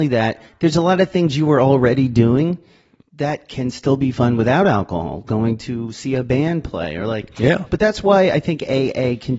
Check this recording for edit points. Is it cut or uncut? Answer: uncut